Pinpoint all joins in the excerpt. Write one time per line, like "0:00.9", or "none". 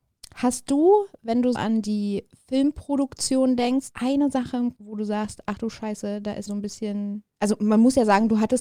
0:01.5
0:03.9
0:04.7
0:06.5